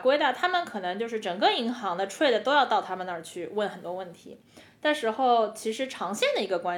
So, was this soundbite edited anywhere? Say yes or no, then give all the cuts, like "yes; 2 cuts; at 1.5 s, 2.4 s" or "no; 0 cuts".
no; 0 cuts